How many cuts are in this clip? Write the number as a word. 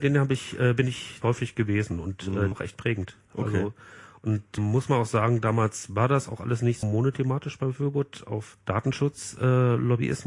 five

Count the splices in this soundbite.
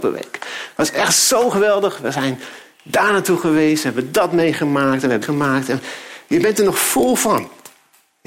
one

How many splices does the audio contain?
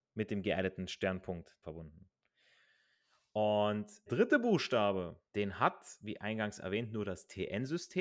three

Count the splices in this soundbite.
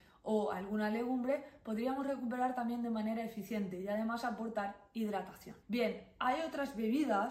one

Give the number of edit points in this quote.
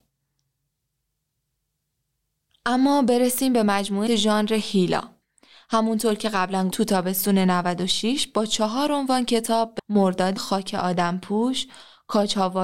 four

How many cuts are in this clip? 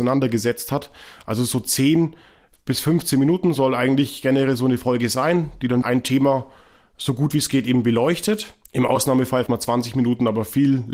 three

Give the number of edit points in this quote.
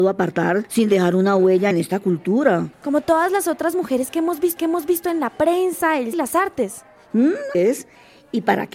five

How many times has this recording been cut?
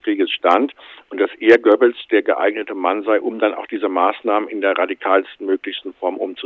zero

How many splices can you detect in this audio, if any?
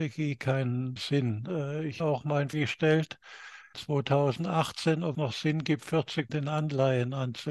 six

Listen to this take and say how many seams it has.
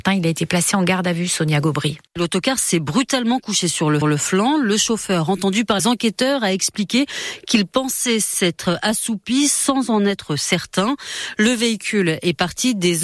three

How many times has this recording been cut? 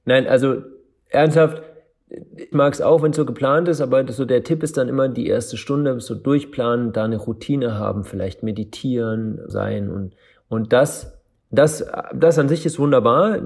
two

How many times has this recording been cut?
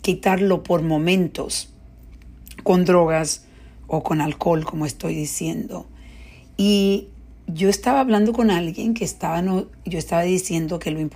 zero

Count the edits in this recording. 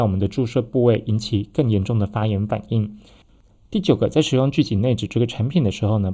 zero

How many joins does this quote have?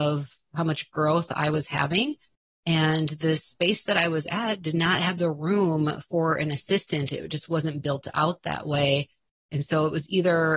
zero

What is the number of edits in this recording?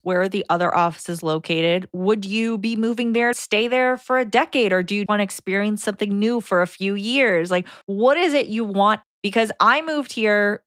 four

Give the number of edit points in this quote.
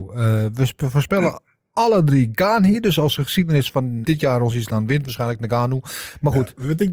two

